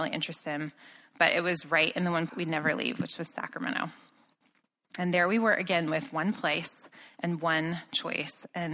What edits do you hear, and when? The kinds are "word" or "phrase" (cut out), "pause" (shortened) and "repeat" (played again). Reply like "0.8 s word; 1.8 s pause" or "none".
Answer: 2.3 s phrase